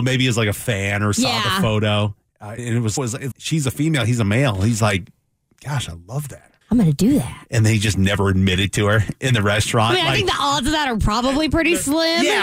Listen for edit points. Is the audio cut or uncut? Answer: cut